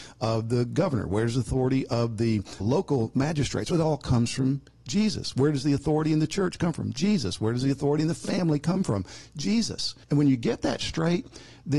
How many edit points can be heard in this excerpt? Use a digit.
2